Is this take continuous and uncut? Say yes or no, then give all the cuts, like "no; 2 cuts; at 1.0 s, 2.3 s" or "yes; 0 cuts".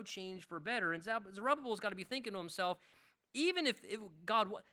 yes; 0 cuts